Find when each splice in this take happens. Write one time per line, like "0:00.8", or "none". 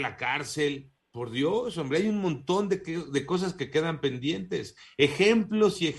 none

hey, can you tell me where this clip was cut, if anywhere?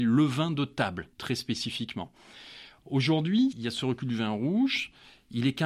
0:01.1
0:03.5

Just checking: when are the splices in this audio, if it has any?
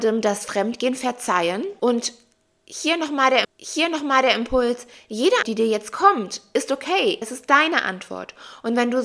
0:03.4
0:05.4
0:07.2

